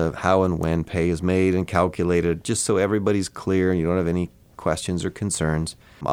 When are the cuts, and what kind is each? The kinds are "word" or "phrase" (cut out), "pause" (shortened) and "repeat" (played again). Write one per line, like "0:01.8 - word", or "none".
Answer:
none